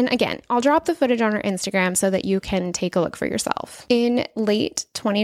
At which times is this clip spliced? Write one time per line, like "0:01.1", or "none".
none